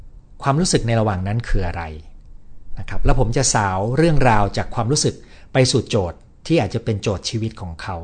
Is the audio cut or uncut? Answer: uncut